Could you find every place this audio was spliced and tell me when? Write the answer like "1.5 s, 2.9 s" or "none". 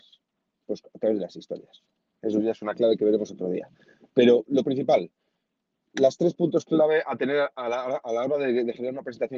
none